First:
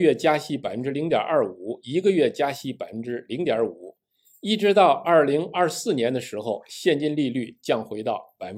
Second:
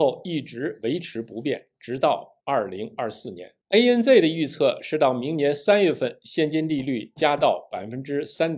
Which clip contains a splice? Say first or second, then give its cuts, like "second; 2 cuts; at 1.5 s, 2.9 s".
second; 2 cuts; at 2.4 s, 3.6 s